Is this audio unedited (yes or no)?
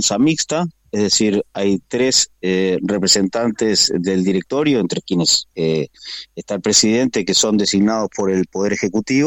no